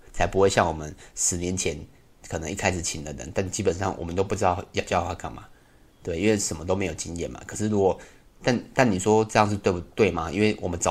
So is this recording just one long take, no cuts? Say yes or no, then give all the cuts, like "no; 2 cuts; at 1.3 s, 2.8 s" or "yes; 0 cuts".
yes; 0 cuts